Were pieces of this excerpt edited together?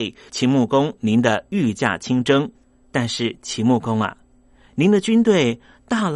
no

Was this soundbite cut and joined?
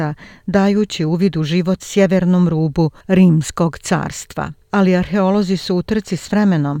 yes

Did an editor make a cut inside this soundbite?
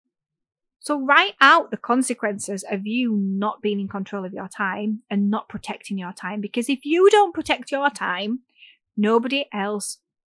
no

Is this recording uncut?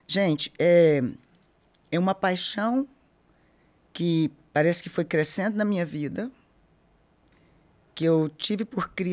yes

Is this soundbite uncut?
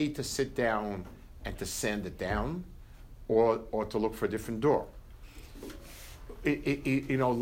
yes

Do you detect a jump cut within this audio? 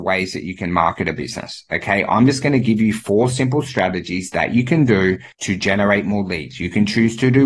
yes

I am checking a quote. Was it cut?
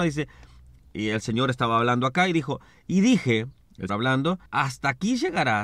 yes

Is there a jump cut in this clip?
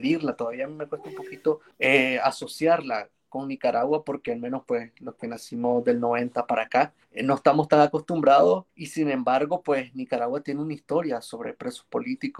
yes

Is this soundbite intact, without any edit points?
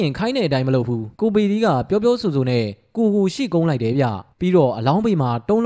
no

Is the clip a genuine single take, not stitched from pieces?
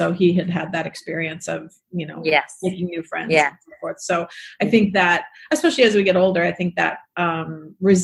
yes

